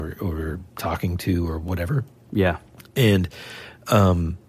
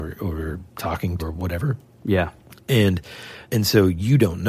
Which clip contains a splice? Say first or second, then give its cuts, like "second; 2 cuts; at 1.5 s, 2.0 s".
second; 2 cuts; at 1.2 s, 3.4 s